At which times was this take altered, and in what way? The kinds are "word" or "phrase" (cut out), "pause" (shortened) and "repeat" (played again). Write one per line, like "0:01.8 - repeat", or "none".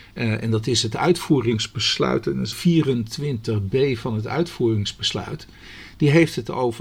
0:02.5 - word

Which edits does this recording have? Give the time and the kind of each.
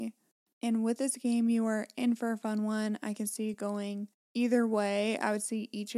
none

